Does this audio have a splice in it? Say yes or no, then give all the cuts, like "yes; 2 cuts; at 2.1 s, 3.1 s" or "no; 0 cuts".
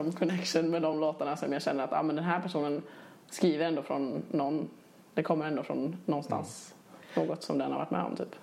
no; 0 cuts